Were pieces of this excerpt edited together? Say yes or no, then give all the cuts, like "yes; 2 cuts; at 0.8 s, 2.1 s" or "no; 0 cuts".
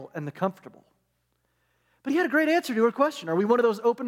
no; 0 cuts